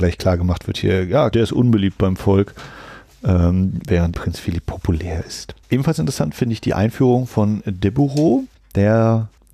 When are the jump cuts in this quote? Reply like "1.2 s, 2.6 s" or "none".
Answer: 1.3 s, 4.1 s, 5.6 s